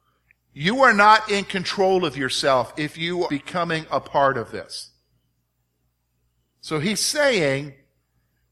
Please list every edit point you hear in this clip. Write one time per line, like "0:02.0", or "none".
0:03.3

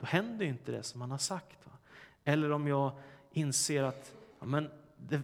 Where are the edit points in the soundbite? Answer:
0:04.3

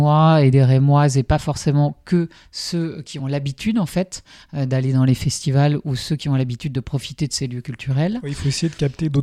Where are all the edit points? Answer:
none

